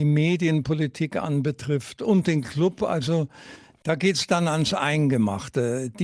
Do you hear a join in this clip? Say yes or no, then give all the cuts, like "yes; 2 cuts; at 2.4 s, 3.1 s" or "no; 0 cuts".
no; 0 cuts